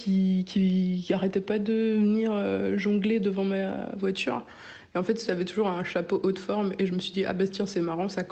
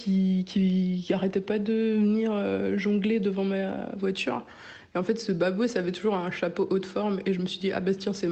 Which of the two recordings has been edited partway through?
first; 1 cut; at 5.3 s

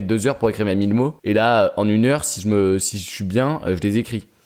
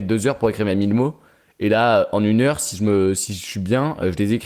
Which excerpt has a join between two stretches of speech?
first; 1 cut; at 1.2 s

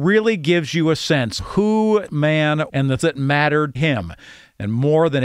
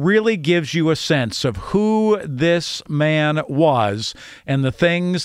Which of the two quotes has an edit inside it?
first; 5 cuts; at 1.4 s, 2.1 s, 2.7 s, 3.0 s, 3.7 s

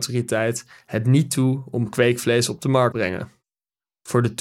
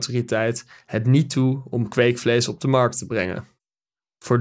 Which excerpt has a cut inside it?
first; 1 cut; at 2.9 s

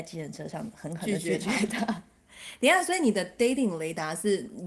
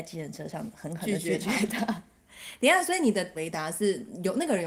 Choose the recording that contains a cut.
second; 1 cut; at 3.3 s

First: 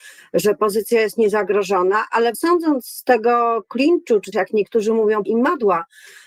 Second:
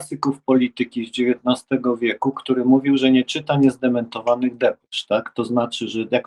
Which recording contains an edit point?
first; 3 cuts; at 2.3 s, 4.3 s, 5.2 s

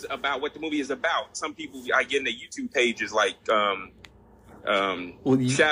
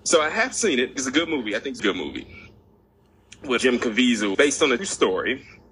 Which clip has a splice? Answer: second; 5 cuts; at 1.0 s, 1.8 s, 3.6 s, 4.3 s, 4.8 s

